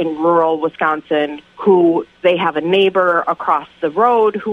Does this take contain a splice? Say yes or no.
no